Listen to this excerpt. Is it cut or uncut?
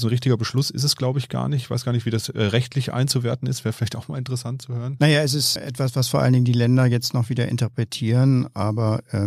cut